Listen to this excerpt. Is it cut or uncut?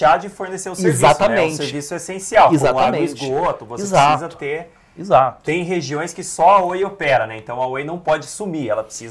uncut